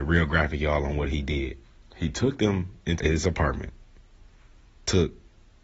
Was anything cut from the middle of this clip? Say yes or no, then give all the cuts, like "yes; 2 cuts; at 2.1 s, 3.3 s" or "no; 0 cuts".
yes; 2 cuts; at 1.6 s, 3.0 s